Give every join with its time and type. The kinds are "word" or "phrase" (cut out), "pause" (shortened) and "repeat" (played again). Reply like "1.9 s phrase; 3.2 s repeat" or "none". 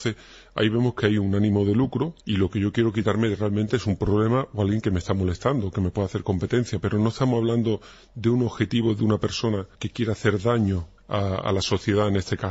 2.2 s pause; 9.7 s pause; 11.0 s pause